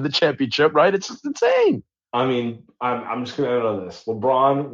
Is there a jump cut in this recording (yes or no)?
no